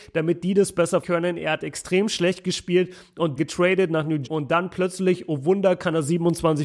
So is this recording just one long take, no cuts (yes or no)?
no